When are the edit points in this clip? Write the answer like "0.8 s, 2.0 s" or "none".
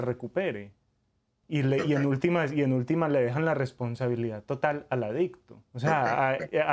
5.7 s